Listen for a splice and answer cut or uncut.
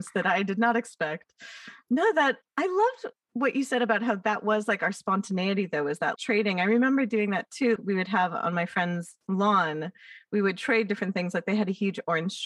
cut